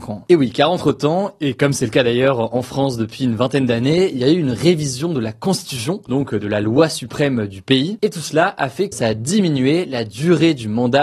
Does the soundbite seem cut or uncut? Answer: cut